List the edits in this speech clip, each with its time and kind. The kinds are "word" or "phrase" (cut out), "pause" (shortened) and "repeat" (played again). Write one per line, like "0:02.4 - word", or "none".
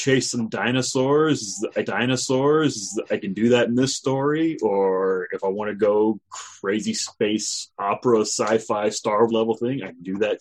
0:01.8 - repeat
0:09.3 - word